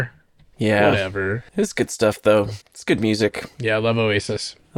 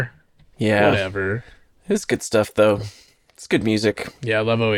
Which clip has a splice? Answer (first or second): first